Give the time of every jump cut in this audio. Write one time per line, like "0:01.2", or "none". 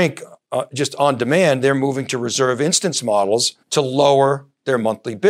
0:03.6